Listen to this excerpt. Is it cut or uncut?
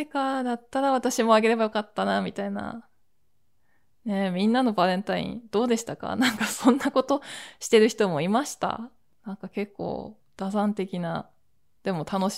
uncut